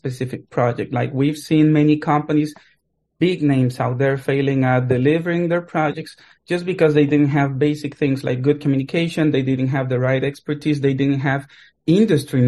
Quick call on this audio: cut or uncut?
uncut